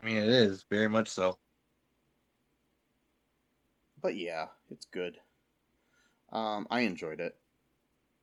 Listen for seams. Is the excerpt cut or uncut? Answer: uncut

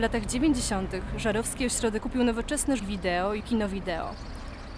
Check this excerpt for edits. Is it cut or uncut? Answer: cut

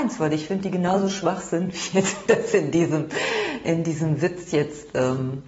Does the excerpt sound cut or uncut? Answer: uncut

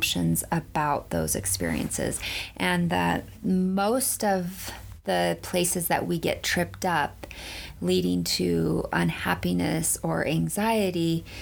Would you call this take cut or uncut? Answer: uncut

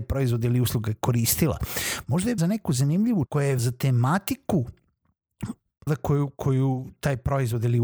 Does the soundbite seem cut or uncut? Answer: cut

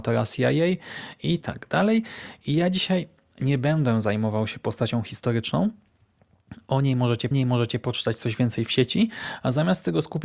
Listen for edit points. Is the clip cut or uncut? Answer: cut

